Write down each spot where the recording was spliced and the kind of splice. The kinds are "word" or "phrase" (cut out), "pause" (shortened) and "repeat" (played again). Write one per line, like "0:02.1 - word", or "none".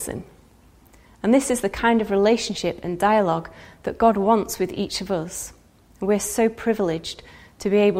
none